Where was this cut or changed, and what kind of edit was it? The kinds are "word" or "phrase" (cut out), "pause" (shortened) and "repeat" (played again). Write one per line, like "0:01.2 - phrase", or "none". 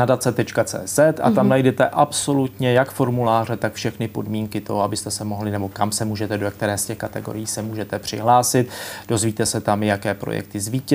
none

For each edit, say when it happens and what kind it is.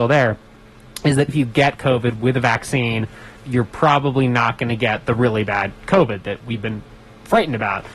0:01.3 - word
0:03.4 - pause

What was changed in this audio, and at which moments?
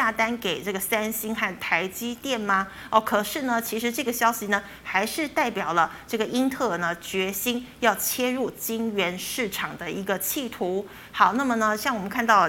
none

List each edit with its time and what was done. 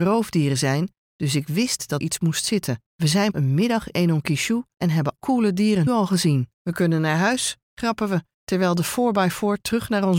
0:02.0 - word
0:02.9 - pause
0:03.3 - word
0:03.9 - word
0:05.2 - word
0:05.9 - word
0:06.5 - pause

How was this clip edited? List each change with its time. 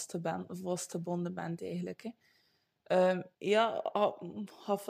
0:03.3 - pause

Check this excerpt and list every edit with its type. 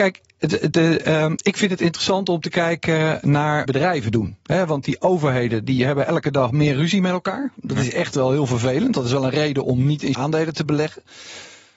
0:03.7 - phrase
0:10.1 - word

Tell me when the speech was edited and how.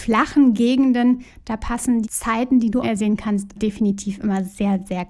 0:02.0 - word
0:02.8 - word
0:03.6 - word

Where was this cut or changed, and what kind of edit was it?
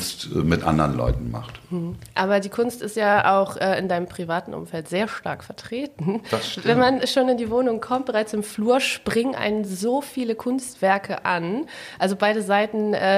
none

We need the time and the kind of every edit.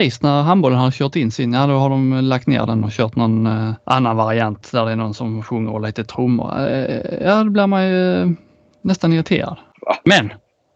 0:03.8 - pause

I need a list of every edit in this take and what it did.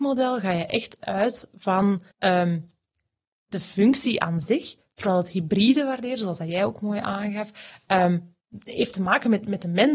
0:02.1 - pause

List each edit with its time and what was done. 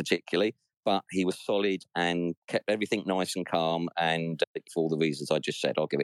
0:04.6 - word

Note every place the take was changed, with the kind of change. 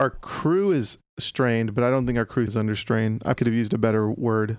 0:02.5 - word
0:03.4 - word

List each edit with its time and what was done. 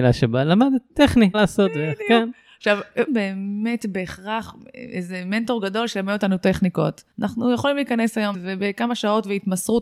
0:01.3 - word
0:03.1 - phrase
0:07.1 - pause
0:08.3 - word

